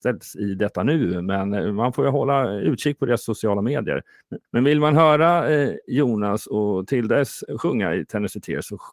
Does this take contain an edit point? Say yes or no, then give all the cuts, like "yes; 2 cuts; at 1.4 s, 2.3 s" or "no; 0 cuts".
yes; 1 cut; at 4.4 s